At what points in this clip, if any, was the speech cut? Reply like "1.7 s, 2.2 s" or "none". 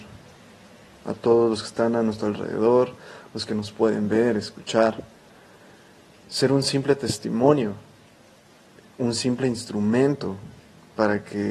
none